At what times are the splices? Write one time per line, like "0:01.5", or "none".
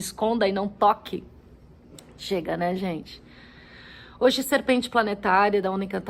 none